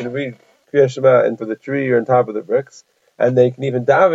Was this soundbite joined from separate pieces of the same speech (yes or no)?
yes